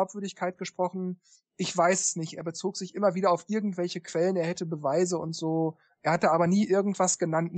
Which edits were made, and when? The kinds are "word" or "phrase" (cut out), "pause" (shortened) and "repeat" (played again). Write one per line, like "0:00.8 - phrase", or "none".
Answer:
none